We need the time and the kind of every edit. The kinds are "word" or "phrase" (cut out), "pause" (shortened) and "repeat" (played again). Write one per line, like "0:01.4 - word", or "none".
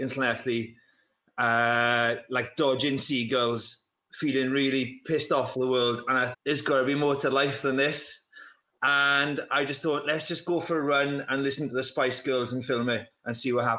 0:06.3 - word